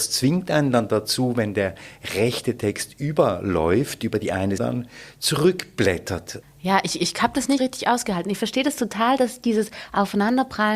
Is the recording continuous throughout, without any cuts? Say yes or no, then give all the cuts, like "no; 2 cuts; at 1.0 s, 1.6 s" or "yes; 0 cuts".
no; 2 cuts; at 4.6 s, 7.6 s